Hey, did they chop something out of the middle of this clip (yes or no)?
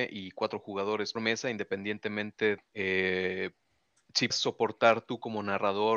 yes